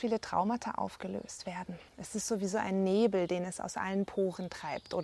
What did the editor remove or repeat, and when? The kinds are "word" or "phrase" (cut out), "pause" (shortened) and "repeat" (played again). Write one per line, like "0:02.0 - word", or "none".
0:01.9 - pause